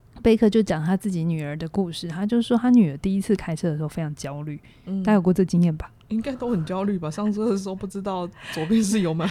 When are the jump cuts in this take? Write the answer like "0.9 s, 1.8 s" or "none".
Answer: none